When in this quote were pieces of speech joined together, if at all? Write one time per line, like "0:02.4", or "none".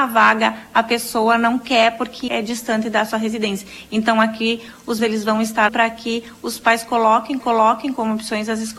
0:02.3
0:05.0
0:05.7
0:07.4